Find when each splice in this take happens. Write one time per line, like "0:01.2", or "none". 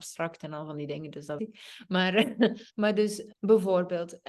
0:01.4
0:02.7
0:03.3